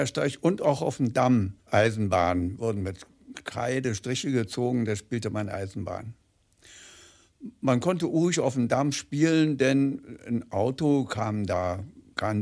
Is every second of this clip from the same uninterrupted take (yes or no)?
no